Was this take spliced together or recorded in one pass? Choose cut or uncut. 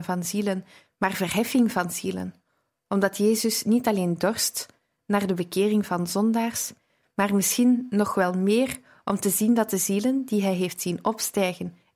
uncut